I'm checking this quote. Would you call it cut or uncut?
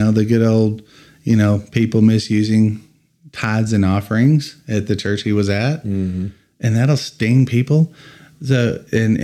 uncut